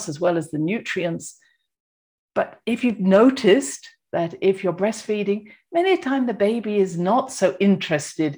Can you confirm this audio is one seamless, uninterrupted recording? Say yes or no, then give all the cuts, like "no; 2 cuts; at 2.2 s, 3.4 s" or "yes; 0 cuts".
yes; 0 cuts